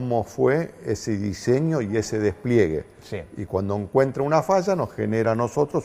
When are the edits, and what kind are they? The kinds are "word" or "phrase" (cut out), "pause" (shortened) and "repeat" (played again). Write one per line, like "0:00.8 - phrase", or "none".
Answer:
none